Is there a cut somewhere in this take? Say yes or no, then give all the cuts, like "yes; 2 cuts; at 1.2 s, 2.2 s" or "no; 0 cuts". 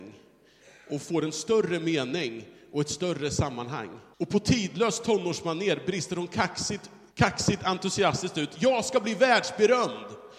yes; 2 cuts; at 4.1 s, 7.1 s